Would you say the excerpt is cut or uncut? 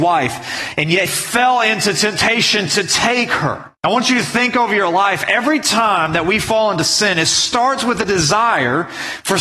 cut